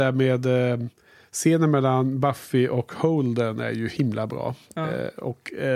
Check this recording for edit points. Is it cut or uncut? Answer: uncut